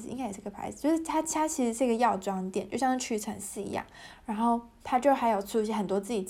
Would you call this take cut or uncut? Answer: uncut